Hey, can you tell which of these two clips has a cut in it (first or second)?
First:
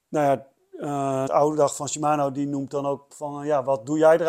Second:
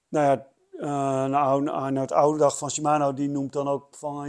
first